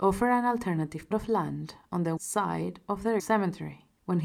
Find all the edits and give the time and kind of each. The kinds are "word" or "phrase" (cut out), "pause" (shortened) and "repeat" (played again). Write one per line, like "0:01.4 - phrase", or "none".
0:01.1 - word
0:02.2 - word
0:03.2 - word